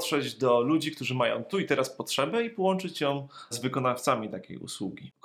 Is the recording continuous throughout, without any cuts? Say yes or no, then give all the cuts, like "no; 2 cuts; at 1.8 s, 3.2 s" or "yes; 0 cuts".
no; 1 cut; at 3.5 s